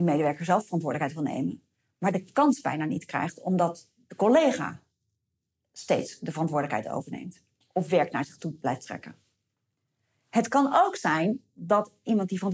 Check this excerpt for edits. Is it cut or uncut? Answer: uncut